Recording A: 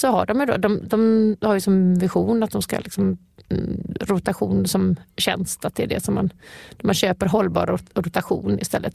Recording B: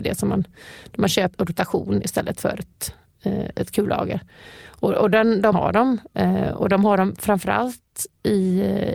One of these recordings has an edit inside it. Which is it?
B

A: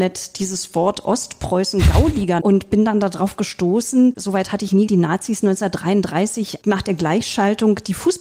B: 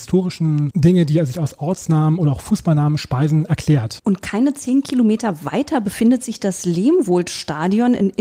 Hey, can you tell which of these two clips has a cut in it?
A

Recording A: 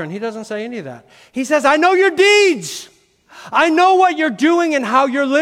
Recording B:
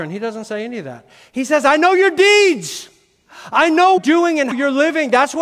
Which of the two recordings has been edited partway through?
B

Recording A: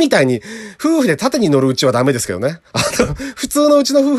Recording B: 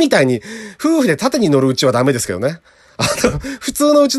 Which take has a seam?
A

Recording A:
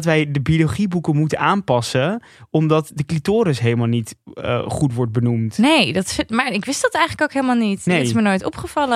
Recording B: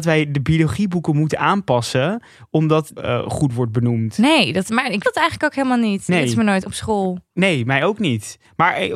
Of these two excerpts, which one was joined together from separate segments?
B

